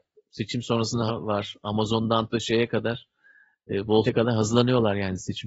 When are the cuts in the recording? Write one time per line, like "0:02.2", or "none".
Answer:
0:01.1
0:02.3
0:04.0